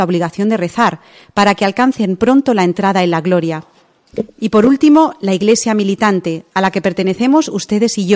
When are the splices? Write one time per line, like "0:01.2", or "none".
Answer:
none